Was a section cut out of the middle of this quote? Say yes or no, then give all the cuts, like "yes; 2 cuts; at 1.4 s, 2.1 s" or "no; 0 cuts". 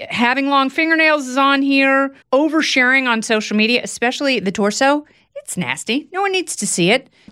yes; 1 cut; at 2.2 s